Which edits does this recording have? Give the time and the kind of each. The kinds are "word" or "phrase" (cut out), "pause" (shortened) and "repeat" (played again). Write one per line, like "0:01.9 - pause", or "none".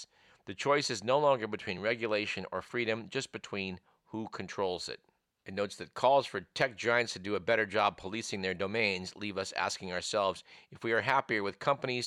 none